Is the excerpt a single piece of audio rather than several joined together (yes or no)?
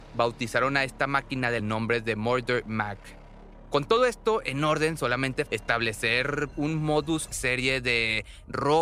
no